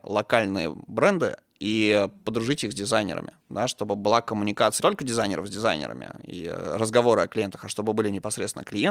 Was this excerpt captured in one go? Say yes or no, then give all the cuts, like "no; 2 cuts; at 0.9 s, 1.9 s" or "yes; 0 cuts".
no; 2 cuts; at 3.4 s, 4.8 s